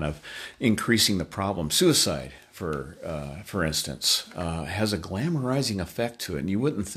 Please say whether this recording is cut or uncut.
uncut